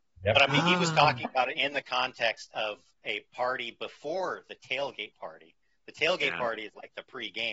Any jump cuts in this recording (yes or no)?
no